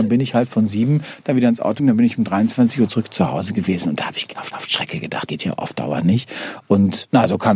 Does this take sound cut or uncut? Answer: cut